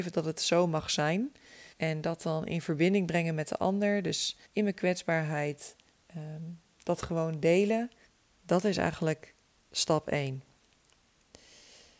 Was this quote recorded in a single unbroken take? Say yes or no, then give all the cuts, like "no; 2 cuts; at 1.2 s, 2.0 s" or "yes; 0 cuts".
no; 4 cuts; at 1.7 s, 4.5 s, 5.9 s, 8.1 s